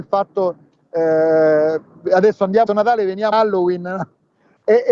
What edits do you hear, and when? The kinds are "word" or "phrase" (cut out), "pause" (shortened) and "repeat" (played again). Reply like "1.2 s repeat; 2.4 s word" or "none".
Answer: 2.7 s word; 3.3 s word